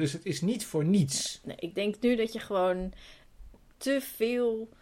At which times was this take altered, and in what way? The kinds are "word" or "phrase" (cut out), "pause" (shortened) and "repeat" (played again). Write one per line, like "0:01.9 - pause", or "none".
none

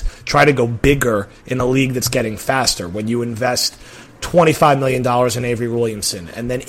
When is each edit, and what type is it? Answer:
none

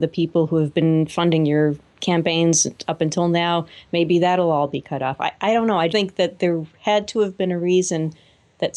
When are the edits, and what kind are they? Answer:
0:05.9 - word

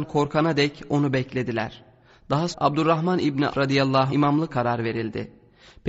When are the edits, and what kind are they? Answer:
0:02.5 - word
0:03.5 - word
0:04.1 - word
0:04.5 - word

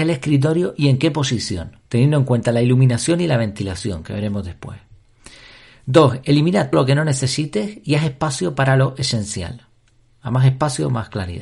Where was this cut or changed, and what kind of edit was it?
0:01.8 - pause
0:06.7 - word

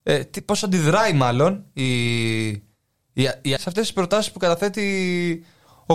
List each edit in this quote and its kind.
0:03.6 - word

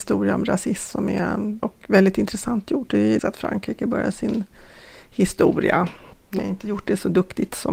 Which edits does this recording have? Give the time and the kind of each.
0:01.6 - word
0:03.2 - word
0:04.1 - word
0:06.4 - word

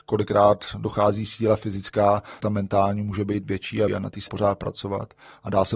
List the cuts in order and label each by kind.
0:02.4 - word
0:03.9 - word
0:04.3 - word

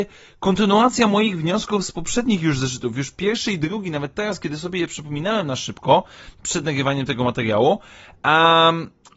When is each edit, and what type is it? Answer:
none

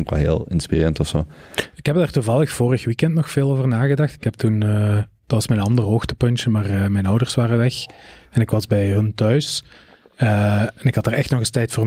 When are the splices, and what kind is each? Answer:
none

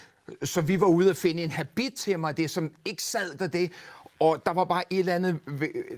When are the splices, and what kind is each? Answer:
0:03.4 - word

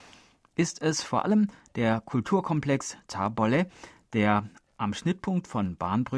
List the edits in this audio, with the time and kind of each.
none

